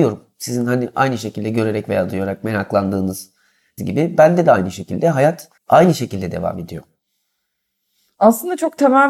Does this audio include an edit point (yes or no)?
yes